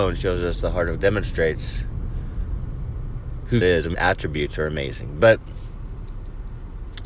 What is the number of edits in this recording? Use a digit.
3